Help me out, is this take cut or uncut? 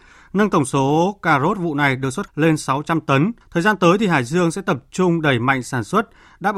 cut